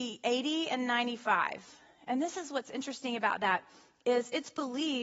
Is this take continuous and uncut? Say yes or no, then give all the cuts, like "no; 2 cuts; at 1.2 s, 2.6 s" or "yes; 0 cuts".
yes; 0 cuts